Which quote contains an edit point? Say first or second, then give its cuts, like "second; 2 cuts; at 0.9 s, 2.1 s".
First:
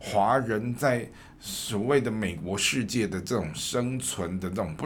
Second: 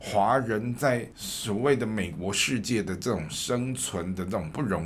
second; 1 cut; at 1.1 s